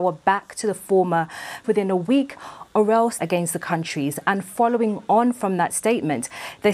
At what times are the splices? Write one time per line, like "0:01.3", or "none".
0:01.6
0:03.2